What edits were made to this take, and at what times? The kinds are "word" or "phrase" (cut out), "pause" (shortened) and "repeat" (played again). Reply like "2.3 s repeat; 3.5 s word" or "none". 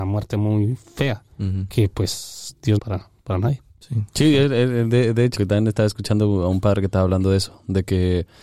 1.3 s pause; 2.8 s phrase; 5.4 s phrase